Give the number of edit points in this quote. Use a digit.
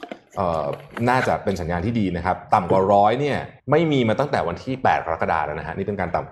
1